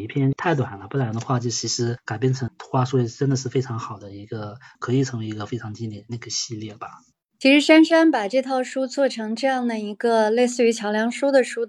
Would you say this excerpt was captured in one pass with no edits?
yes; 0 cuts

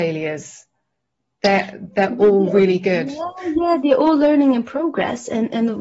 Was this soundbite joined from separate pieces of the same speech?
no; 0 cuts

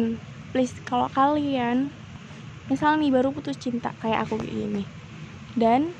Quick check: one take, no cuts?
yes; 0 cuts

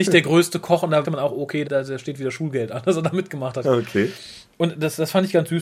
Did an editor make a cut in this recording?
yes; 3 cuts; at 1.0 s, 1.6 s, 3.6 s

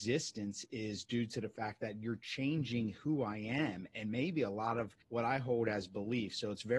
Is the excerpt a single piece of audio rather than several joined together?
no; 1 cut; at 5.0 s

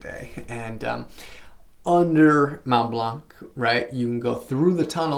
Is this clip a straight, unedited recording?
yes; 0 cuts

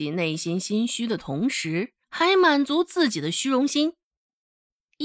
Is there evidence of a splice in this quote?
yes; 1 cut; at 2.0 s

